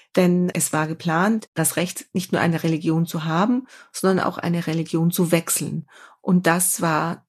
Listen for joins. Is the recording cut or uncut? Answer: uncut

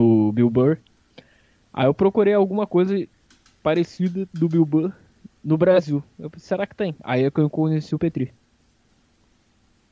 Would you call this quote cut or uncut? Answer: uncut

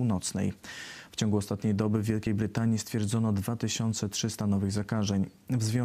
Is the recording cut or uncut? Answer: uncut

